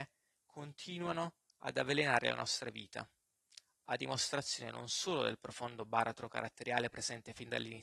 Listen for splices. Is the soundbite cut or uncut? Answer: uncut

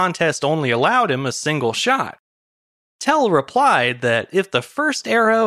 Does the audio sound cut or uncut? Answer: uncut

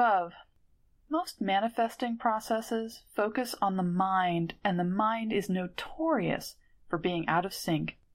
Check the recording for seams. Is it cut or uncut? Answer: uncut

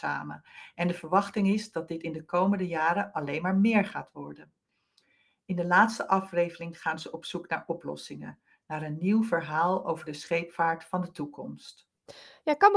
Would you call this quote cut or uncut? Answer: uncut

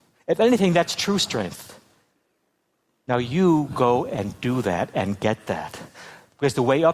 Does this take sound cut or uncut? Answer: uncut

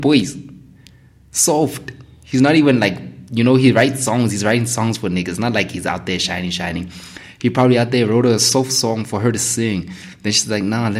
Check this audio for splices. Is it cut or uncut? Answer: uncut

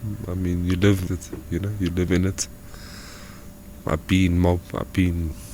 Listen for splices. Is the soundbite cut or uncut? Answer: cut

